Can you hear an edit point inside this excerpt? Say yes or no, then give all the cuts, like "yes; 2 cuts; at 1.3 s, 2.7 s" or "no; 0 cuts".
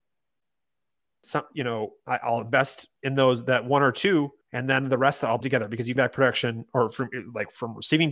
yes; 4 cuts; at 2.9 s, 4.4 s, 5.4 s, 6.0 s